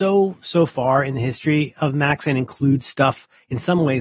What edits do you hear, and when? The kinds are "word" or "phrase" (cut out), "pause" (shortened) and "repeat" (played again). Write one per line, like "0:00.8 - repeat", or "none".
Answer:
none